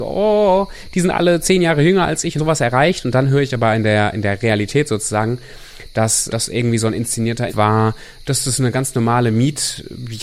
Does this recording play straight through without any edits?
no; 3 cuts; at 2.4 s, 6.3 s, 7.5 s

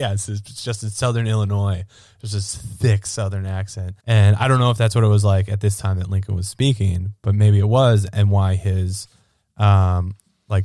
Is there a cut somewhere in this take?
yes; 1 cut; at 4.0 s

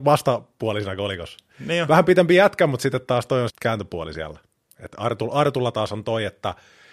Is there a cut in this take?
yes; 1 cut; at 3.5 s

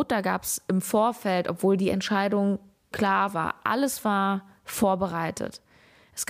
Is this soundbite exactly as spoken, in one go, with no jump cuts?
no; 1 cut; at 2.9 s

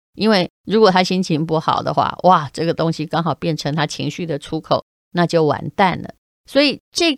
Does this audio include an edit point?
yes; 1 cut; at 6.2 s

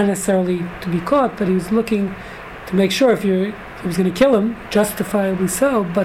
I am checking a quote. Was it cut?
no; 0 cuts

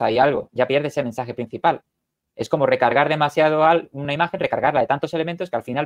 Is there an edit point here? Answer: no; 0 cuts

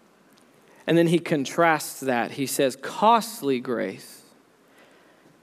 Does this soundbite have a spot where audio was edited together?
no; 0 cuts

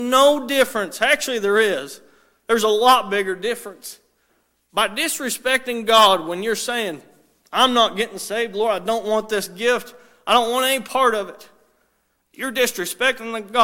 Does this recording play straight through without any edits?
yes; 0 cuts

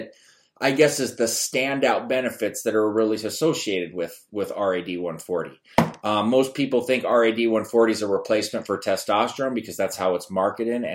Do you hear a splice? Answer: no; 0 cuts

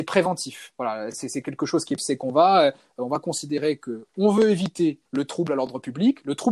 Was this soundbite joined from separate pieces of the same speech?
yes; 2 cuts; at 2.0 s, 5.1 s

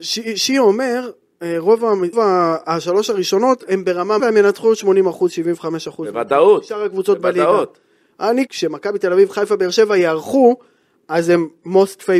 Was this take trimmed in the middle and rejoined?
yes; 3 cuts; at 2.1 s, 4.2 s, 8.5 s

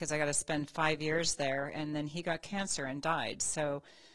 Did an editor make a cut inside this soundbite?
no; 0 cuts

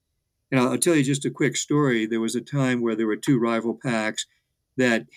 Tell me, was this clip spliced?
no; 0 cuts

